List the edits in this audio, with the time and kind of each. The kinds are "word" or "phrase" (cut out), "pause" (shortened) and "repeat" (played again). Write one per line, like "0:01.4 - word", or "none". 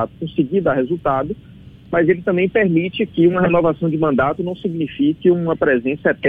none